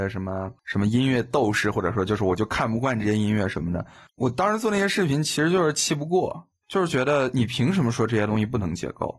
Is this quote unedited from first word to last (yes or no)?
yes